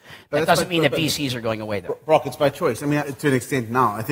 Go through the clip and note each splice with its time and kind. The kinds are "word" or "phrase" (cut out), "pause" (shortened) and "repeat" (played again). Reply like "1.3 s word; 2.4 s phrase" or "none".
3.0 s word